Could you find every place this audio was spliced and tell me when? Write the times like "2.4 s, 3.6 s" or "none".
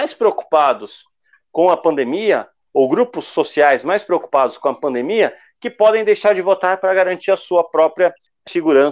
none